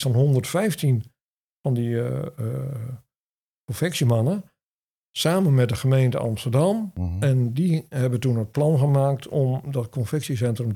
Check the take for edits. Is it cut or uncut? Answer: uncut